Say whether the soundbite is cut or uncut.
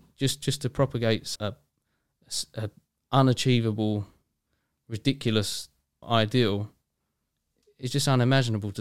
cut